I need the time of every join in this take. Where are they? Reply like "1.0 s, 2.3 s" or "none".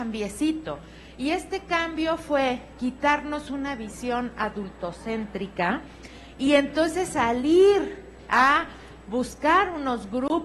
none